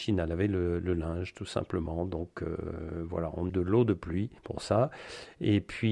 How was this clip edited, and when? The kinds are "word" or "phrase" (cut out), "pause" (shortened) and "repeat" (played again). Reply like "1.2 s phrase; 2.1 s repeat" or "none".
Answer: 3.5 s word; 4.4 s pause